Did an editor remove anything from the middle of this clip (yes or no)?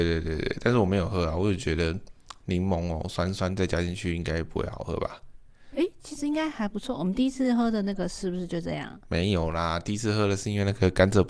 no